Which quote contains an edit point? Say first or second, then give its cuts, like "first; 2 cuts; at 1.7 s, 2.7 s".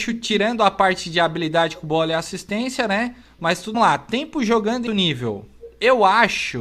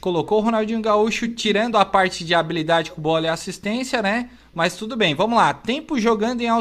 first; 2 cuts; at 3.7 s, 4.9 s